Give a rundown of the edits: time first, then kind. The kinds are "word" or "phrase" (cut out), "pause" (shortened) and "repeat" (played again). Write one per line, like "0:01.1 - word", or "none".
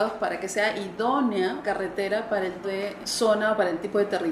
0:01.6 - word
0:02.6 - word
0:03.0 - word

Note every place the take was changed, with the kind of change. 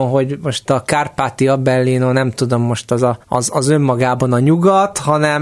0:03.2 - pause

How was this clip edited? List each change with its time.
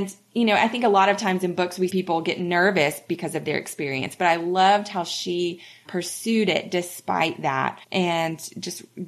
0:01.9 - word
0:05.9 - word
0:07.8 - pause

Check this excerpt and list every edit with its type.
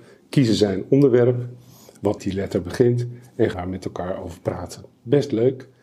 0:02.2 - word
0:03.5 - word

